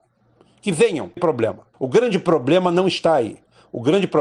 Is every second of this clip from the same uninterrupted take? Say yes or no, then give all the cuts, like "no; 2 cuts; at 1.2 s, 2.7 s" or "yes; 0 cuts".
no; 2 cuts; at 1.2 s, 1.7 s